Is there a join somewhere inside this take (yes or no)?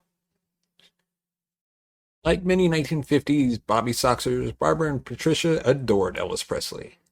no